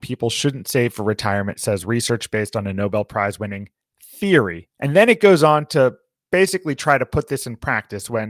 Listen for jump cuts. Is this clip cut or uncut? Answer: uncut